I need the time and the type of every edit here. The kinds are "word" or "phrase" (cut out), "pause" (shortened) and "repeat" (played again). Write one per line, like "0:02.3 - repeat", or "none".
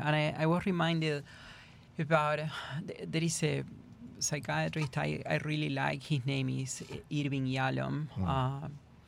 0:01.9 - pause